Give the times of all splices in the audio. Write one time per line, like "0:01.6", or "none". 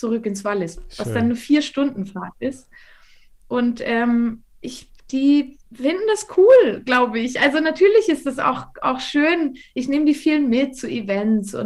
0:05.6